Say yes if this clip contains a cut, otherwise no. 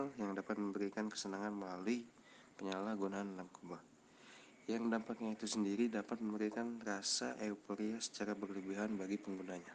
no